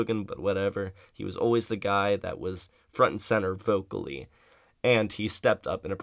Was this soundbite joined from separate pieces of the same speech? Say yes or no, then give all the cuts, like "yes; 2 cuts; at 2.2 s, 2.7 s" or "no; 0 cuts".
no; 0 cuts